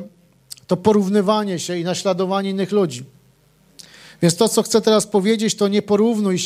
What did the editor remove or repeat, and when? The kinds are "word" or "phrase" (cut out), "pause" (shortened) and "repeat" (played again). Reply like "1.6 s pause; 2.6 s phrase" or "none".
none